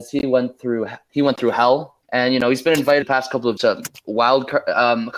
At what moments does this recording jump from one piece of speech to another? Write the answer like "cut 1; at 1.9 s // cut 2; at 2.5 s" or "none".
cut 1; at 1.1 s // cut 2; at 2.0 s // cut 3; at 3.0 s // cut 4; at 3.6 s